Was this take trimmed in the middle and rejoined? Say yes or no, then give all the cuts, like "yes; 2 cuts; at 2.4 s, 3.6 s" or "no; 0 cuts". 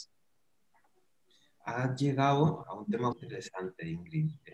yes; 2 cuts; at 2.6 s, 3.1 s